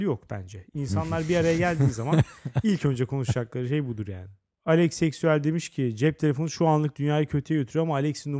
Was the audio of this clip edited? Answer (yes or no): no